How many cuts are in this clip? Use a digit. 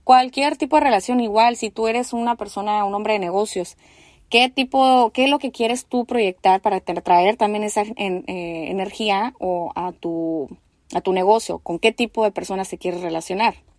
0